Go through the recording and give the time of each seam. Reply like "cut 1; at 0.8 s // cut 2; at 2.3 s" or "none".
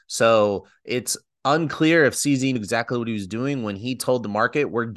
cut 1; at 2.6 s